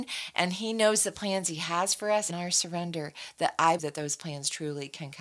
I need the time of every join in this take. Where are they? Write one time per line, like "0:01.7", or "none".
0:02.3
0:03.8